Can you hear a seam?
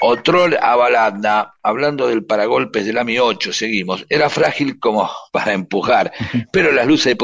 no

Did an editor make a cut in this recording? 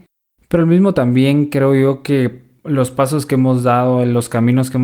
yes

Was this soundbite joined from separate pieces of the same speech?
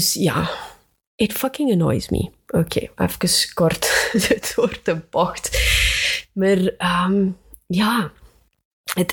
no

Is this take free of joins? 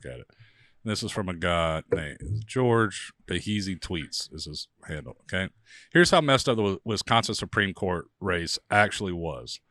no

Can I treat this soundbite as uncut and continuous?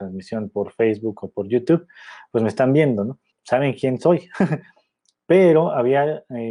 no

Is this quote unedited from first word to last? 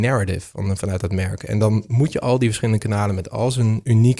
yes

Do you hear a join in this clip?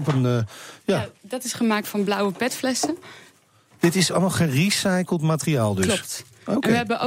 no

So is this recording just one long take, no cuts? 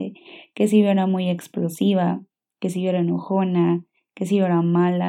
yes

